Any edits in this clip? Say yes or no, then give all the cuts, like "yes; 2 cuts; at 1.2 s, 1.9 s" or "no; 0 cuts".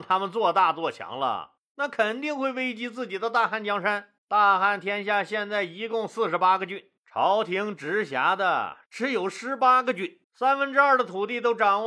yes; 4 cuts; at 1.6 s, 4.2 s, 7.0 s, 10.2 s